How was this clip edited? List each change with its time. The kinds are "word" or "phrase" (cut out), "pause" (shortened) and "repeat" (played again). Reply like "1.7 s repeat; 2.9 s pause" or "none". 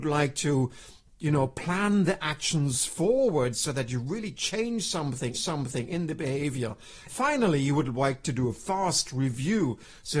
5.3 s repeat; 7.1 s phrase; 8.2 s word